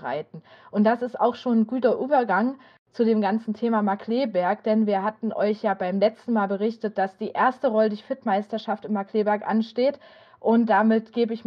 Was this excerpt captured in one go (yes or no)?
yes